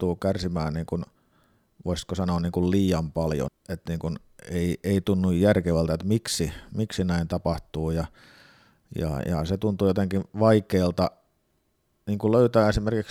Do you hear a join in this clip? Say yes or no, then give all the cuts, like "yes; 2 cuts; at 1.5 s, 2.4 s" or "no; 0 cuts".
yes; 1 cut; at 3.5 s